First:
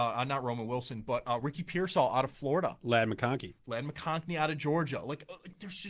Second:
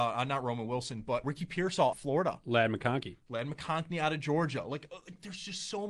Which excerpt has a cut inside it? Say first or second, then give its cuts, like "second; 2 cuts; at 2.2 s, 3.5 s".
second; 2 cuts; at 1.2 s, 1.9 s